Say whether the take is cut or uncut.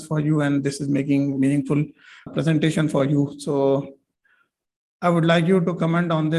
cut